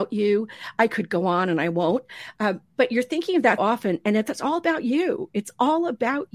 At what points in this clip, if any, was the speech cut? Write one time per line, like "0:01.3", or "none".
0:03.6

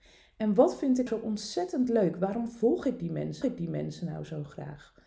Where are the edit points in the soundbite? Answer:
0:01.1
0:03.4

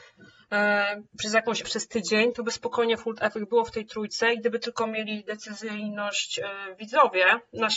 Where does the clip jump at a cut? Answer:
0:01.6

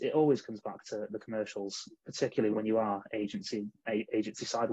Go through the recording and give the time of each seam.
0:02.5

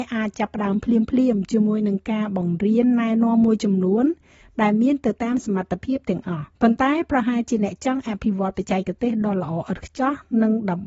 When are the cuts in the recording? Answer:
0:06.5

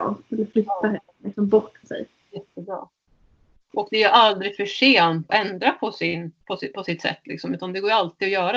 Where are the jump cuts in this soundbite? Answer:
0:01.8
0:05.3
0:06.4

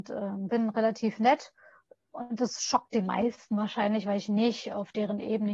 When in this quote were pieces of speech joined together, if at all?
none

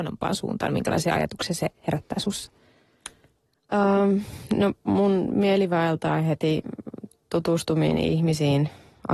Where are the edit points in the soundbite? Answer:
none

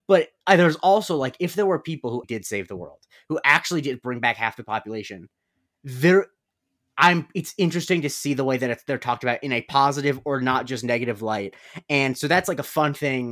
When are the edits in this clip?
0:02.2

